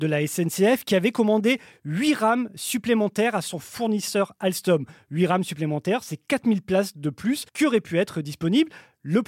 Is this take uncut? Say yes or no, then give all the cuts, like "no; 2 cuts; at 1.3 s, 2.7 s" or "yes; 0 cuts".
no; 1 cut; at 7.5 s